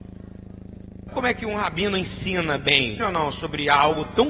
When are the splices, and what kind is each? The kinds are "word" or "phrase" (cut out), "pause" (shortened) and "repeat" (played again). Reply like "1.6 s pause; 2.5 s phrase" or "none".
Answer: 1.1 s word; 3.0 s word